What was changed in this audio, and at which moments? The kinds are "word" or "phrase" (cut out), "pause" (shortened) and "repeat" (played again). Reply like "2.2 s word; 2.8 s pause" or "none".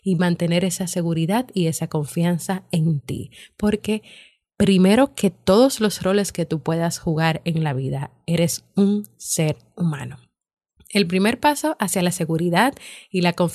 none